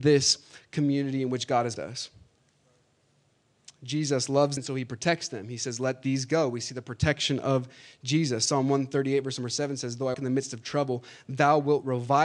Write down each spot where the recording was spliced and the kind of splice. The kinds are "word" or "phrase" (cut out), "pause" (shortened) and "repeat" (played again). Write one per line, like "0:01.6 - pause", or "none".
0:01.8 - word
0:04.6 - word
0:10.1 - word